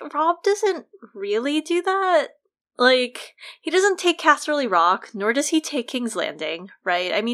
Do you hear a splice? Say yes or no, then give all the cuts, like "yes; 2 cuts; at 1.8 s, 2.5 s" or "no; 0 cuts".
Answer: no; 0 cuts